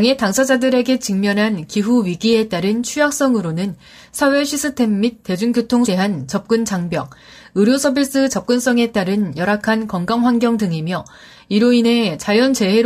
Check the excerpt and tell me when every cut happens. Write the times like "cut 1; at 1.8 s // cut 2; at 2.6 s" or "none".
cut 1; at 5.8 s